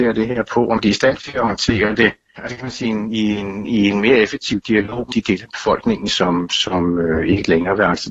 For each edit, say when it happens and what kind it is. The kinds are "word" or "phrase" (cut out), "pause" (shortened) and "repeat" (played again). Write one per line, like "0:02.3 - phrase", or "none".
0:02.8 - phrase
0:05.1 - phrase